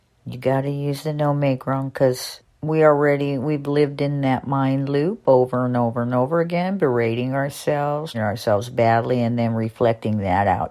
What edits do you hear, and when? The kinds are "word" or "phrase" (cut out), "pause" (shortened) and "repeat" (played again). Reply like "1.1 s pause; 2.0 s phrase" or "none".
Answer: 8.1 s word